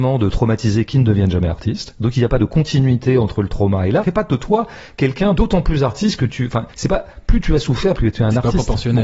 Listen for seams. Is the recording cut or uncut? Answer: cut